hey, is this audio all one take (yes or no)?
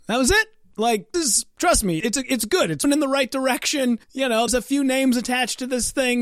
no